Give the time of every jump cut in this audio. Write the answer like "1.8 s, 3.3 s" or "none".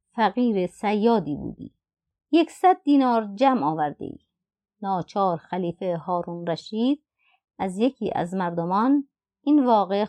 none